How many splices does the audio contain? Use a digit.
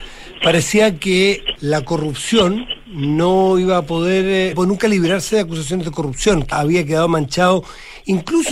3